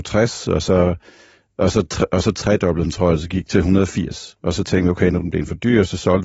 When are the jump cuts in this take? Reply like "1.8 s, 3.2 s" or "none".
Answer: none